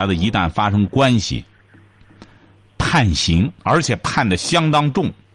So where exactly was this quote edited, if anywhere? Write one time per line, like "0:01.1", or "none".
0:03.6